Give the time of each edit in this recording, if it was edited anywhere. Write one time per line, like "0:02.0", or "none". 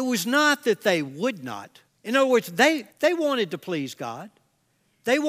0:01.9
0:02.9